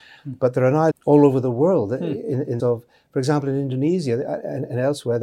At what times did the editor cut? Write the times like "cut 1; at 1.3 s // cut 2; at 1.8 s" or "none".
cut 1; at 0.9 s // cut 2; at 2.6 s